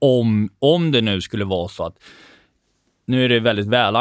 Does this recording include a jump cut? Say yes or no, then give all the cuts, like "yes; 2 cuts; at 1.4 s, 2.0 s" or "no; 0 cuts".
no; 0 cuts